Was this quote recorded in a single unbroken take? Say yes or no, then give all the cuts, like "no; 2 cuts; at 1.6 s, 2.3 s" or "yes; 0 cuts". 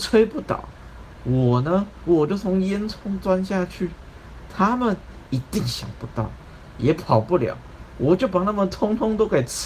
no; 1 cut; at 6.7 s